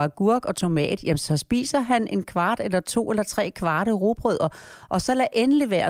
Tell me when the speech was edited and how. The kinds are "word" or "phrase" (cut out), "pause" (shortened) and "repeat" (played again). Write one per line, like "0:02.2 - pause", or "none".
none